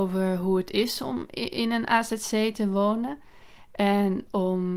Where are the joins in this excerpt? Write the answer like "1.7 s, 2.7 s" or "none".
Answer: none